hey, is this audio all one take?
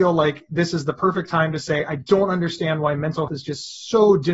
no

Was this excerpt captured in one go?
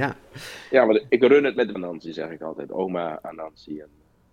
no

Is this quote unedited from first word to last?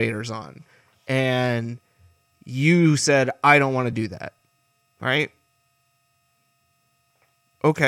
yes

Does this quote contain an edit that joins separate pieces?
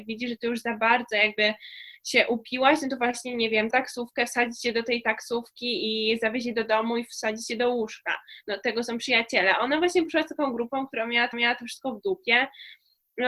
yes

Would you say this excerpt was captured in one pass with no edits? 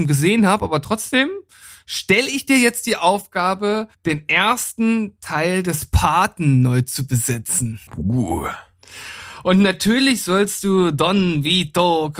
no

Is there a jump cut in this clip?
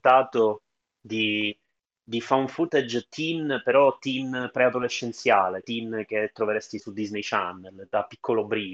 yes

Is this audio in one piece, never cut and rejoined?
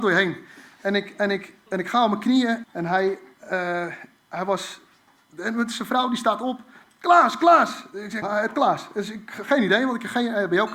no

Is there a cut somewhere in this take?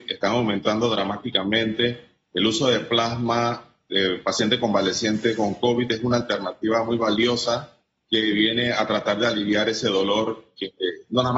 no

